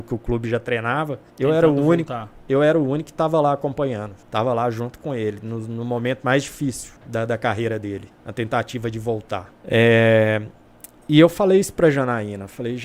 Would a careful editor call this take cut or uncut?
cut